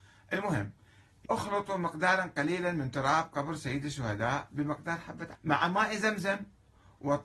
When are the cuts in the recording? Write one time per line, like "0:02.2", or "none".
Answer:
0:01.2
0:05.3